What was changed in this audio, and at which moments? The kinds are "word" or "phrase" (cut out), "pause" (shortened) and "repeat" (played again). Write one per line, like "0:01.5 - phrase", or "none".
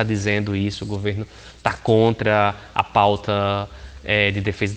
none